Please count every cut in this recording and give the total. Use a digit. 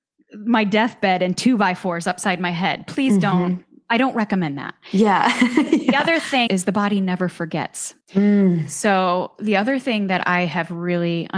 2